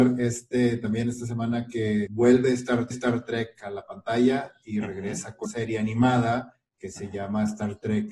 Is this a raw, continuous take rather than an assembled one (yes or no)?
no